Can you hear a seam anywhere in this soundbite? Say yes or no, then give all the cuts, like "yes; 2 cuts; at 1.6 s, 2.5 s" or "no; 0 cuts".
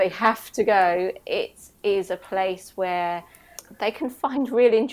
no; 0 cuts